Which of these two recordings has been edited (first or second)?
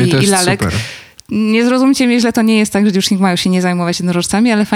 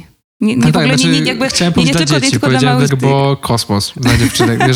second